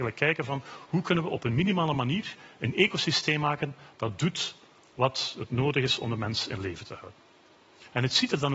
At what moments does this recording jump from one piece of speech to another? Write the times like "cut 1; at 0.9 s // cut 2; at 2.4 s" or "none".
none